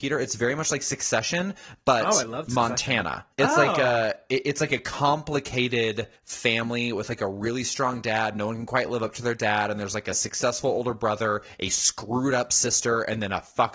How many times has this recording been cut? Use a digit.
2